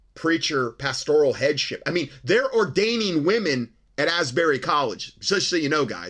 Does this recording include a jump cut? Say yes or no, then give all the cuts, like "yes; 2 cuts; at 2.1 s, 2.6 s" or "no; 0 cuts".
no; 0 cuts